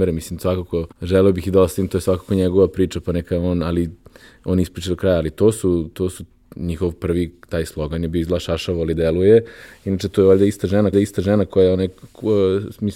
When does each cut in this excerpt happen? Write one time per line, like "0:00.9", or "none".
0:00.9
0:10.9